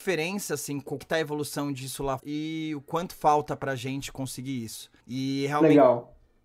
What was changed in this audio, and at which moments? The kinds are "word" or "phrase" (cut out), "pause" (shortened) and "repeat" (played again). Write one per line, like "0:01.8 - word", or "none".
0:01.0 - phrase
0:02.2 - word
0:05.0 - pause